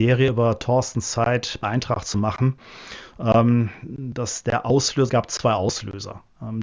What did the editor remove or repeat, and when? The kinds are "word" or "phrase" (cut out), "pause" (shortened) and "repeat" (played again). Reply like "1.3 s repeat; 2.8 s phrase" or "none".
1.6 s word; 5.1 s word